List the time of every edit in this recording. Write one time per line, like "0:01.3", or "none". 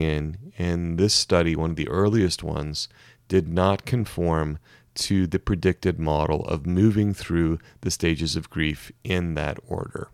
none